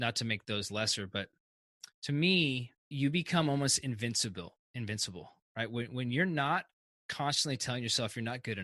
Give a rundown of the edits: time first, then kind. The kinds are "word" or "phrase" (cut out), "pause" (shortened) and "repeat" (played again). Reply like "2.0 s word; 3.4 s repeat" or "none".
2.8 s pause; 5.5 s pause